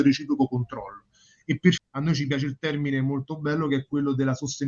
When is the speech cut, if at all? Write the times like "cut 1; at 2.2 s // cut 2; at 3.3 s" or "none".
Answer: cut 1; at 1.8 s